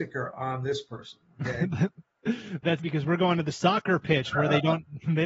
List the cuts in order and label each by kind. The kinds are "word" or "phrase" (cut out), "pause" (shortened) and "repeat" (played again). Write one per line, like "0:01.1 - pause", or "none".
0:02.8 - word